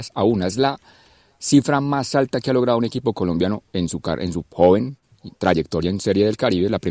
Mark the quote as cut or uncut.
uncut